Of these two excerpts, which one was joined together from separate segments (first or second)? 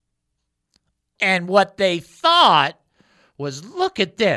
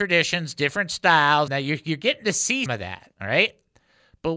second